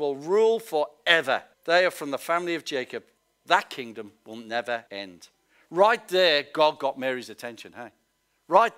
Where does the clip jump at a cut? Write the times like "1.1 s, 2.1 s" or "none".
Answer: 1.5 s, 3.2 s, 4.9 s